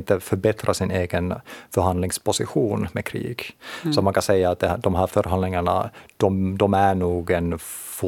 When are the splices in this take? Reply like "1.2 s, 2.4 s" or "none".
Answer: 5.1 s, 6.1 s